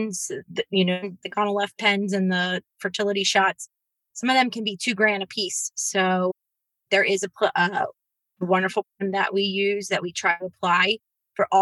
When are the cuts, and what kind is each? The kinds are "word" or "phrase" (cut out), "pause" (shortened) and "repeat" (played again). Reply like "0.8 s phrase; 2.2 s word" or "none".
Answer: none